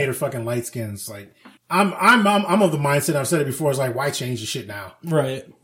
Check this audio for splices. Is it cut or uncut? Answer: cut